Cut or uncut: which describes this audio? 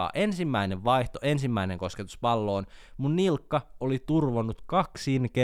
uncut